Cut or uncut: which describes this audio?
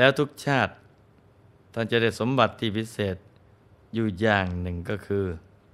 uncut